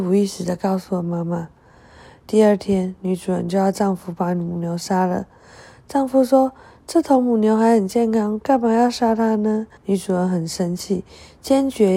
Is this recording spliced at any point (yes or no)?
yes